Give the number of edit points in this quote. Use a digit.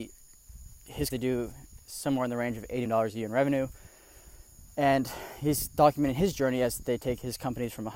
2